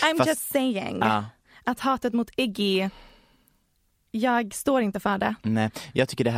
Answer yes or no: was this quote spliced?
no